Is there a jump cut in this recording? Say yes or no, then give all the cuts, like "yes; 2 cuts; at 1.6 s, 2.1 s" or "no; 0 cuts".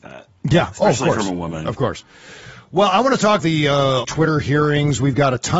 yes; 2 cuts; at 3.4 s, 4.0 s